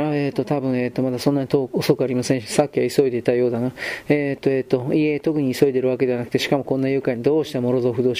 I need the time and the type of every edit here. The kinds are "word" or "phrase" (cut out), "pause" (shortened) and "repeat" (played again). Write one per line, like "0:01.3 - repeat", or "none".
none